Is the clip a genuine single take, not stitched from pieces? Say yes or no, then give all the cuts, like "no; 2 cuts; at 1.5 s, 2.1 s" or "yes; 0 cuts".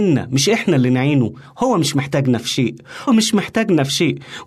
no; 1 cut; at 3.1 s